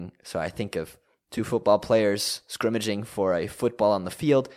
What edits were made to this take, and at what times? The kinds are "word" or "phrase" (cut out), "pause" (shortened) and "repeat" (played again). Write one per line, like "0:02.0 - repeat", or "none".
none